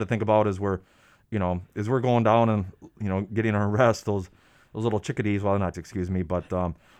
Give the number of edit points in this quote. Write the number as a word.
one